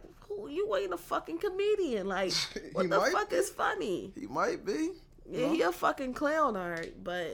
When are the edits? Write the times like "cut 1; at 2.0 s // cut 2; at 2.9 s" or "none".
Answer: none